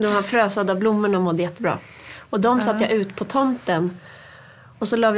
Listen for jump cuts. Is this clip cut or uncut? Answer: uncut